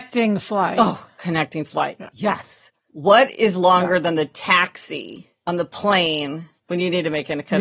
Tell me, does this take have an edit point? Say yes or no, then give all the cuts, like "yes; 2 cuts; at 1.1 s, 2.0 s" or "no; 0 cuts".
yes; 1 cut; at 6.6 s